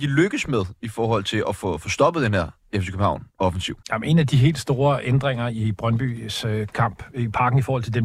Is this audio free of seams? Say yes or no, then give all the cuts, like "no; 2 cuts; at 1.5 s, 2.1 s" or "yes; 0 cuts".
no; 1 cut; at 3.8 s